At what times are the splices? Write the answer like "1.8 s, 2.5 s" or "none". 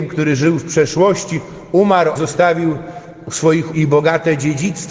2.2 s, 3.7 s